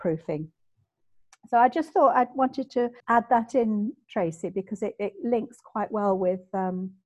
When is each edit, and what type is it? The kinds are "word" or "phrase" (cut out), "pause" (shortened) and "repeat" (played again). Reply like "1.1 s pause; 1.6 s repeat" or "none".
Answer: 3.0 s pause